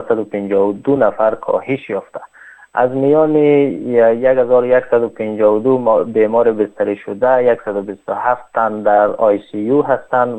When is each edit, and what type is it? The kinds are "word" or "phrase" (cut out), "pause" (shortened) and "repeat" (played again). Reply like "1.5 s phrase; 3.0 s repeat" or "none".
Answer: none